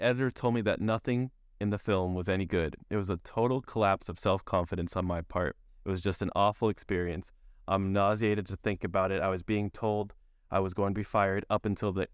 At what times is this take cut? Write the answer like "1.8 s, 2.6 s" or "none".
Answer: none